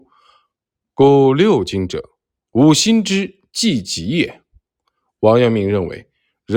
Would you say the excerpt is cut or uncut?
uncut